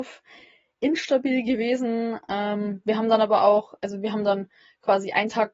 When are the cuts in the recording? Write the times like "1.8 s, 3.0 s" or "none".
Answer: none